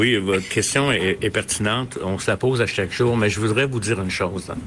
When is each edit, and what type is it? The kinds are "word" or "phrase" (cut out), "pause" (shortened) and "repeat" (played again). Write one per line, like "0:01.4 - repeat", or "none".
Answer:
none